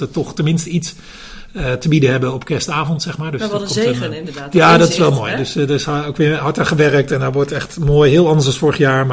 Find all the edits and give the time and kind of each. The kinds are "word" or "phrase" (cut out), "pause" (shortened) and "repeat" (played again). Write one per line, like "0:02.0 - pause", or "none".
none